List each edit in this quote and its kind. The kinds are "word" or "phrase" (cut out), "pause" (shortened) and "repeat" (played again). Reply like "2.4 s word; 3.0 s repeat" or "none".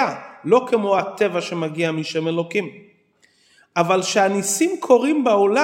none